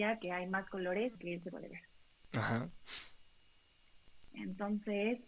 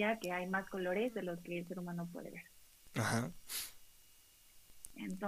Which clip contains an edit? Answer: first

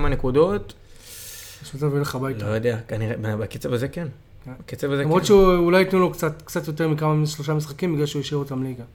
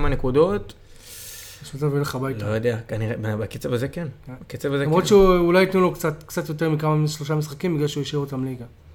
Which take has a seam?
second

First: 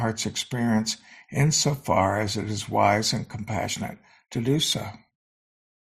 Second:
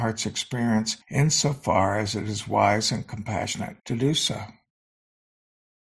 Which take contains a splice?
second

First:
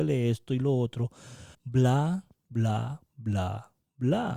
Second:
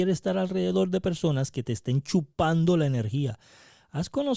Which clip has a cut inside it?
first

